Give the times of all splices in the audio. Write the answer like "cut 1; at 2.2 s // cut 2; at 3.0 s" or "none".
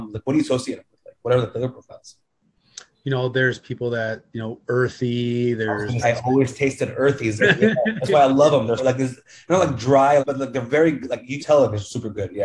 cut 1; at 6.0 s // cut 2; at 7.4 s // cut 3; at 8.8 s // cut 4; at 10.2 s // cut 5; at 11.4 s